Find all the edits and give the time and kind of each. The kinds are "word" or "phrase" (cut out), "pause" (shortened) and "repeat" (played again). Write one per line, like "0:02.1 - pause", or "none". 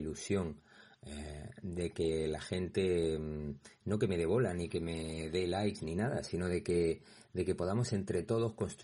none

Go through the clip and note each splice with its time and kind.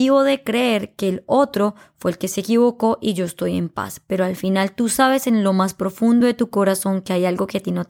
none

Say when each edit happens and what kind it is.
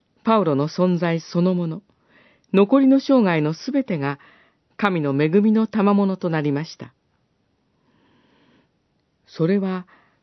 none

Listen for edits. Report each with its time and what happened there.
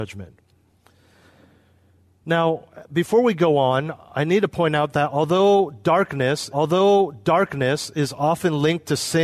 0:06.5 - repeat

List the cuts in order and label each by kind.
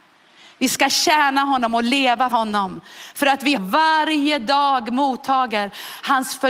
0:02.3 - word
0:03.6 - phrase

